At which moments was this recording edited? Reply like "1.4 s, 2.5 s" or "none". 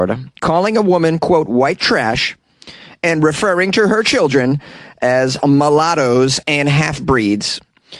none